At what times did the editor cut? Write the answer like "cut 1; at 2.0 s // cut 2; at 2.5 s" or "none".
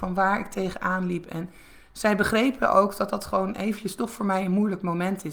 none